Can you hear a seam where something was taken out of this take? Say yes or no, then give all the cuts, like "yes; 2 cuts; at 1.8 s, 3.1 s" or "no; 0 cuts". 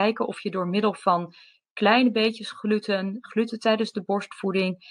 no; 0 cuts